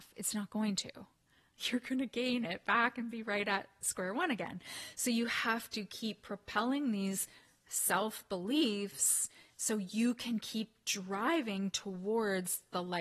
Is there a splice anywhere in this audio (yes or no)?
no